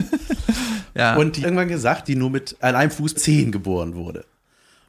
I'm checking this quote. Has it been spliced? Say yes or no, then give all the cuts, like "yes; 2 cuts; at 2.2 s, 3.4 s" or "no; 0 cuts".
yes; 4 cuts; at 1.4 s, 2.0 s, 2.6 s, 3.1 s